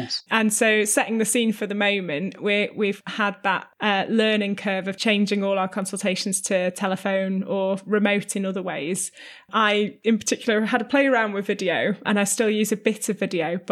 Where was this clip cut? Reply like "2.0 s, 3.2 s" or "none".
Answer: 12.0 s